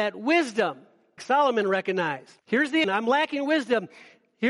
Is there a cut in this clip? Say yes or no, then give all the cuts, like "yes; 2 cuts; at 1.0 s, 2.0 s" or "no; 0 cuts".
yes; 3 cuts; at 1.2 s, 2.4 s, 2.8 s